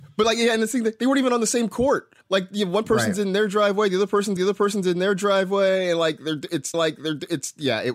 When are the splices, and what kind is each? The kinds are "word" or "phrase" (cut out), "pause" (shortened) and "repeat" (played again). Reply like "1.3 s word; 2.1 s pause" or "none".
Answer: 2.2 s pause; 4.4 s repeat; 6.7 s repeat